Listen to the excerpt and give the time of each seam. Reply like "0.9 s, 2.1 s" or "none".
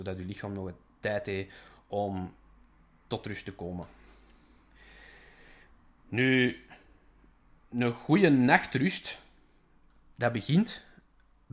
none

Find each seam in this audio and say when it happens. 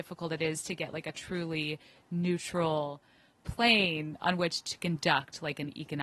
none

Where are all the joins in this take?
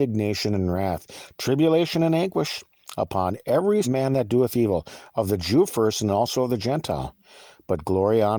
3.8 s

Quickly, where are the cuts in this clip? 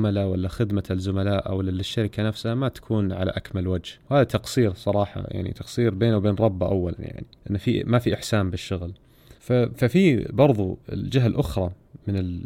4.0 s, 7.4 s, 9.4 s, 10.8 s

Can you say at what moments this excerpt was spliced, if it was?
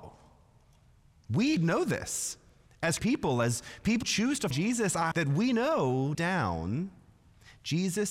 1.6 s, 3.0 s, 4.0 s, 4.5 s, 5.1 s, 6.1 s

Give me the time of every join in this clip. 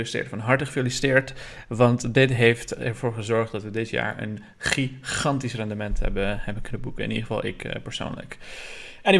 none

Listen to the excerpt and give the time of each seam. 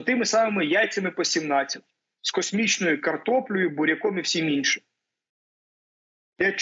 none

